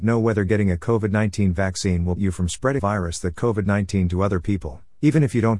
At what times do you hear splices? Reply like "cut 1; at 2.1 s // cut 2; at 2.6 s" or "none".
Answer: cut 1; at 2.2 s // cut 2; at 2.8 s // cut 3; at 3.3 s